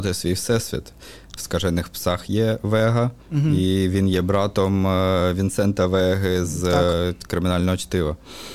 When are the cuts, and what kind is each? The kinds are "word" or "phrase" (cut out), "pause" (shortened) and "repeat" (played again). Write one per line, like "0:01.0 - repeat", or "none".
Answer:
0:01.4 - word
0:03.2 - pause